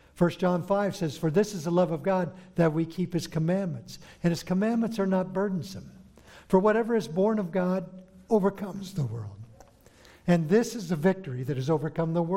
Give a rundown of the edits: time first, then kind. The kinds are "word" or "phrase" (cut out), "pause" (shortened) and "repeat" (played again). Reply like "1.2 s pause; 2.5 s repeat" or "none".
none